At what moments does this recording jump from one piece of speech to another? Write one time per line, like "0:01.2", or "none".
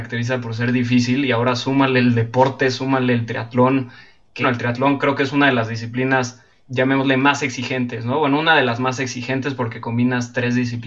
0:04.4
0:06.7

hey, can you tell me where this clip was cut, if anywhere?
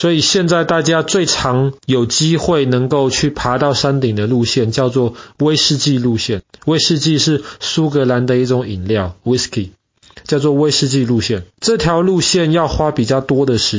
0:01.8
0:11.5

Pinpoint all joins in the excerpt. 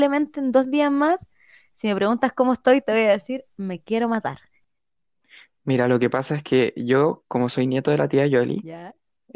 none

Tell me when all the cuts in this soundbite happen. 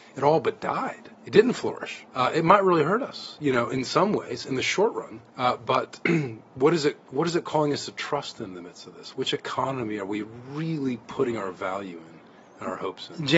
0:01.1
0:02.1
0:05.3
0:06.0

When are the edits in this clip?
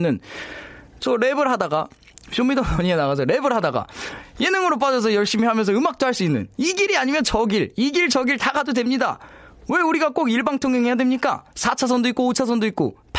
none

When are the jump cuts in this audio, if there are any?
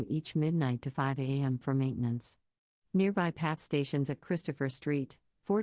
none

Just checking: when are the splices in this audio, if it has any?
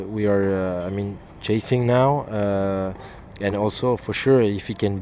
none

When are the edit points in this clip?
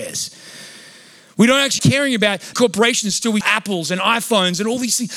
0:01.8
0:02.5
0:03.4

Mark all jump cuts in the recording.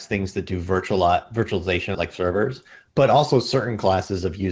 0:01.9

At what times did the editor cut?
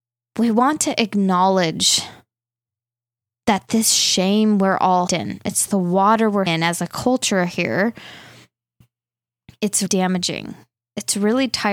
0:05.1
0:06.5
0:09.9

